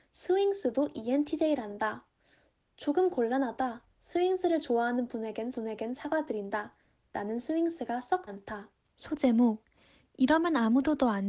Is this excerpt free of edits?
no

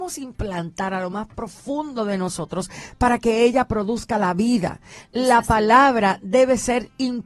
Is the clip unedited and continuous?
yes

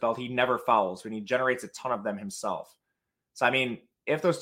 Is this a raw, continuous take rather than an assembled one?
yes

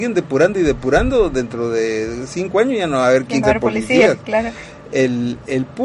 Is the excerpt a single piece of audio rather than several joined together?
no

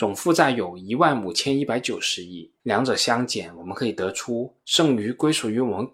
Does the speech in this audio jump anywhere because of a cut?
yes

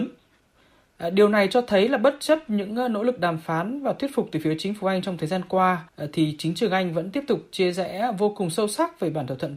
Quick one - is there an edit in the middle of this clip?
yes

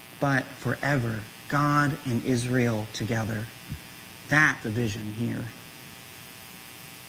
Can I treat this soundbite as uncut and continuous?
no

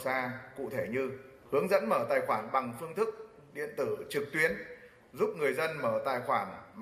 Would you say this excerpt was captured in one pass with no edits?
yes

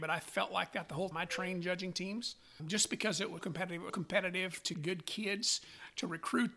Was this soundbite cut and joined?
yes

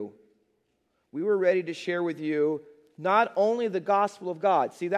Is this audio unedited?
yes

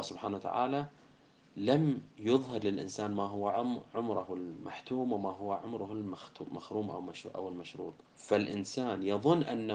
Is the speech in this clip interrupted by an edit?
yes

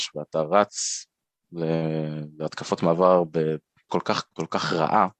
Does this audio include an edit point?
yes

